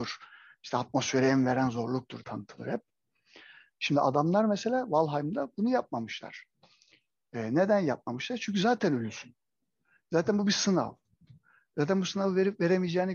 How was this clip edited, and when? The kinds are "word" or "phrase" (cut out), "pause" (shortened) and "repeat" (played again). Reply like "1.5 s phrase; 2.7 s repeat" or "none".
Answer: 2.2 s word